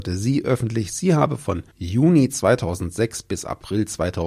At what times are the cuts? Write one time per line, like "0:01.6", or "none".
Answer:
0:01.7